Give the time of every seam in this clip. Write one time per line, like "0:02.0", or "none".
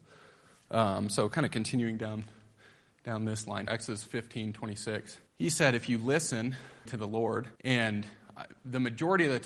0:03.7
0:05.3
0:06.9
0:07.6